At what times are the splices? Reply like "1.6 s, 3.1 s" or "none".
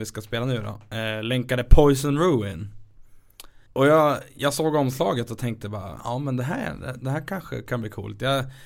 3.7 s